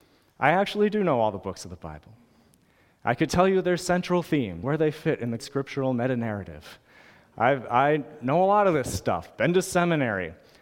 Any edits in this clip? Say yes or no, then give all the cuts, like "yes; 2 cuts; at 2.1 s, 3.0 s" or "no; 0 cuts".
yes; 2 cuts; at 4.6 s, 5.4 s